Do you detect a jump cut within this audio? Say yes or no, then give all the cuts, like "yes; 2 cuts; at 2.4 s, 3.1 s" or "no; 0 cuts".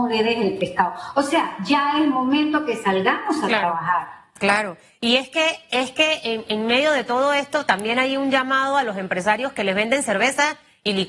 no; 0 cuts